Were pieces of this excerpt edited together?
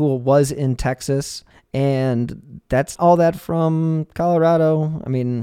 yes; 3 cuts; at 1.5 s, 2.9 s, 3.4 s

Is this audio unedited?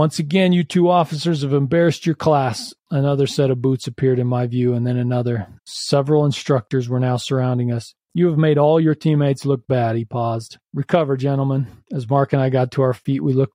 no; 3 cuts; at 5.6 s, 8.0 s, 10.6 s

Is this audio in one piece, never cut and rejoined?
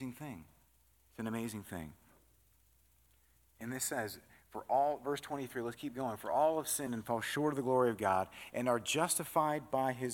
yes; 0 cuts

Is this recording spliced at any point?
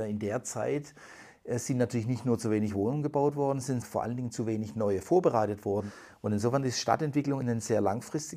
yes; 2 cuts; at 3.8 s, 7.4 s

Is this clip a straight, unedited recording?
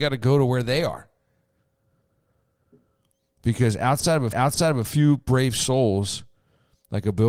no; 1 cut; at 4.3 s

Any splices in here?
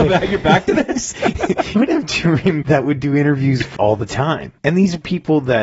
yes; 4 cuts; at 1.8 s, 2.6 s, 3.8 s, 4.6 s

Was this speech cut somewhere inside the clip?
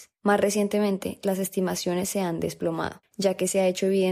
no; 0 cuts

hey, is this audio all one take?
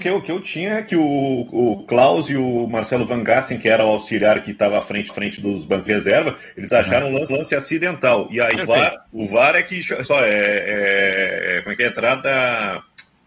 no; 6 cuts; at 5.1 s, 5.9 s, 7.3 s, 8.5 s, 9.1 s, 10.0 s

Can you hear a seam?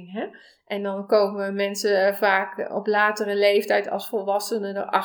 no; 0 cuts

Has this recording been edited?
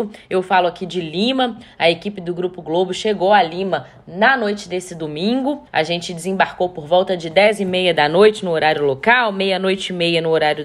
yes; 1 cut; at 5.7 s

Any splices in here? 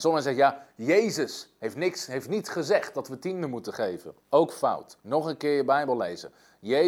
yes; 2 cuts; at 4.2 s, 5.0 s

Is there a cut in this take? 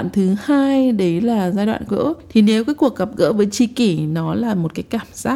yes; 1 cut; at 1.9 s

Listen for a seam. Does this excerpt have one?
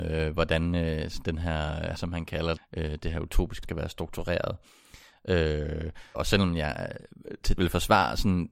yes; 5 cuts; at 2.0 s, 2.6 s, 3.6 s, 6.1 s, 7.6 s

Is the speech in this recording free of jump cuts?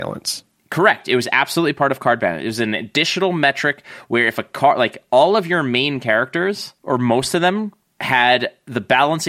no; 2 cuts; at 6.8 s, 7.9 s

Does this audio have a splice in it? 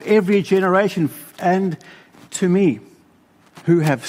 yes; 1 cut; at 1.4 s

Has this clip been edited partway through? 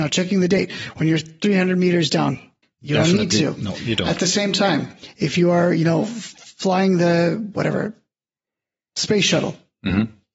yes; 1 cut; at 2.6 s

